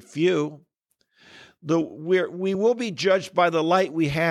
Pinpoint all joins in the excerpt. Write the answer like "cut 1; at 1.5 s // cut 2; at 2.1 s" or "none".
none